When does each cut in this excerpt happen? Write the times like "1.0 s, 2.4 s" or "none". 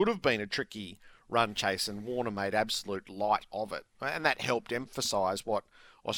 none